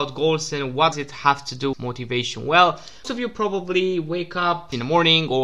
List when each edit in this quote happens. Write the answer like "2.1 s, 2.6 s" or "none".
0.9 s, 1.7 s, 3.0 s